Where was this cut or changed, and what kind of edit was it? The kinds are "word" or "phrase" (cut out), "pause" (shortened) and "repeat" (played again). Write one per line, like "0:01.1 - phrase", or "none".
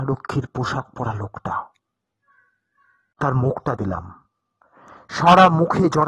0:03.2 - word
0:03.8 - word